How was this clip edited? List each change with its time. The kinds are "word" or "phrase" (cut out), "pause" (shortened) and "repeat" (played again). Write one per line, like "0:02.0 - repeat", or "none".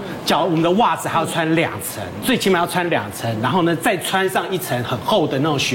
0:02.2 - word